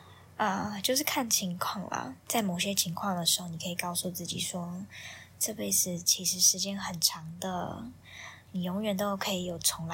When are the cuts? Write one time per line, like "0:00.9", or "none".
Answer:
0:02.2